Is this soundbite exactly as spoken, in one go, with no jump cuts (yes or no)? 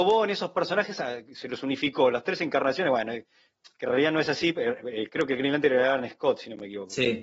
yes